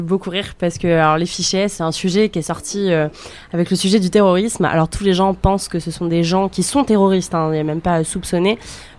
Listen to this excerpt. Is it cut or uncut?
cut